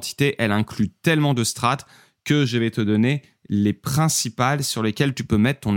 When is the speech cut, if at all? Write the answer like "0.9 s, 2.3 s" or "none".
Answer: none